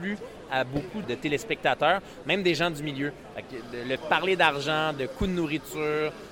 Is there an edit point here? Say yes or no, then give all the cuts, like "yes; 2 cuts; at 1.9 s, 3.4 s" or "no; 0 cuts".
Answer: yes; 1 cut; at 4.0 s